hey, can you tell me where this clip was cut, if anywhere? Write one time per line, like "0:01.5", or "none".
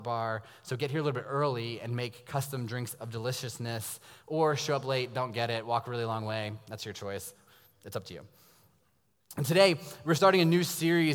none